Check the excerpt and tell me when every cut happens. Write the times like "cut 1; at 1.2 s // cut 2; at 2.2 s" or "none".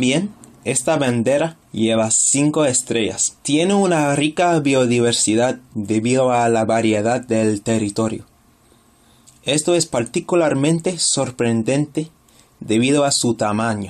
cut 1; at 1.6 s // cut 2; at 3.4 s